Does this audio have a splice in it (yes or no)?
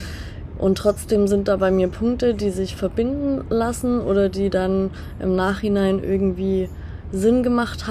no